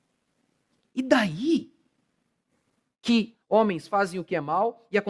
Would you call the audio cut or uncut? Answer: cut